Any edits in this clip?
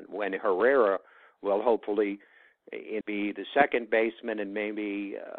yes; 1 cut; at 3.0 s

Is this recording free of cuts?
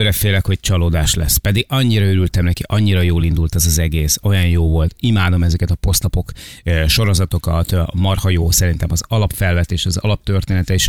yes; 0 cuts

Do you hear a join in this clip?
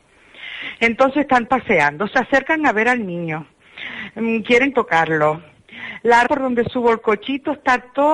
yes; 3 cuts; at 1.5 s, 4.7 s, 6.3 s

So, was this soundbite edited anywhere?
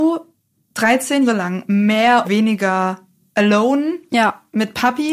yes; 2 cuts; at 1.3 s, 2.2 s

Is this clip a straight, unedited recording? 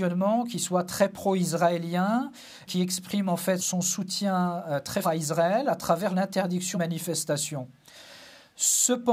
no; 4 cuts; at 2.7 s, 3.6 s, 5.0 s, 6.7 s

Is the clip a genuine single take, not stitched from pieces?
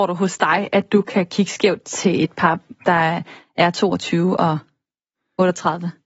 yes; 0 cuts

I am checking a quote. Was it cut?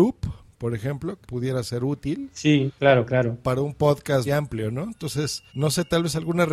yes; 4 cuts; at 1.2 s, 2.8 s, 4.3 s, 5.5 s

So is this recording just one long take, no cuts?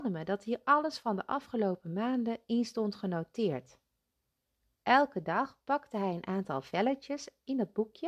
yes; 0 cuts

